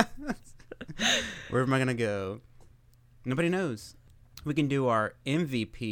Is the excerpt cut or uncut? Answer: uncut